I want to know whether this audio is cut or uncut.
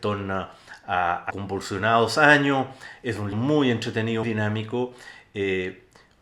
cut